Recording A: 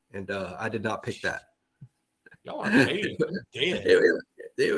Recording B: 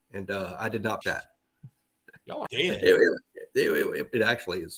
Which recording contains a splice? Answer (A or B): B